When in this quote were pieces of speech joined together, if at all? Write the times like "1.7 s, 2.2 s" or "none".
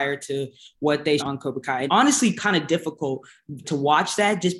1.2 s, 1.9 s, 3.6 s